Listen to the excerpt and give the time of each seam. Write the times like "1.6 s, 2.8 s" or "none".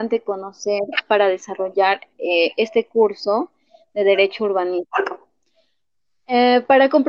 none